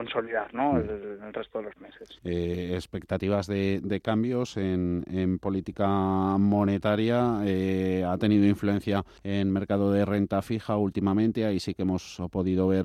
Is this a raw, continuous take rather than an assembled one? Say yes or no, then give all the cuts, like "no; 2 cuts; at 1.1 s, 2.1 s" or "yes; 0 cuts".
no; 2 cuts; at 2.2 s, 9.2 s